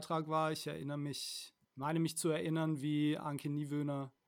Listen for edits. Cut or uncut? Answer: cut